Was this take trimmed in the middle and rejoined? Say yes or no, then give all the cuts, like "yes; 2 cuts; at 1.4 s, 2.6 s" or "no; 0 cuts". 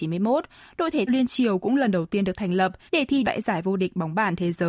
yes; 3 cuts; at 1.1 s, 2.9 s, 3.2 s